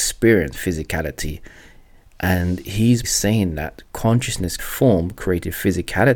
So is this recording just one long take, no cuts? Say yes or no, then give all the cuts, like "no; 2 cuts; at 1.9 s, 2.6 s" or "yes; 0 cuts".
no; 2 cuts; at 3.0 s, 4.6 s